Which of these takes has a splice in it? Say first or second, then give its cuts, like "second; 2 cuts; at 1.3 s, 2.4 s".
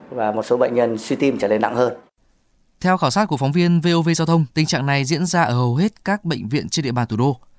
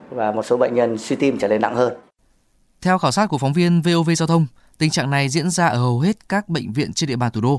first; 1 cut; at 4.5 s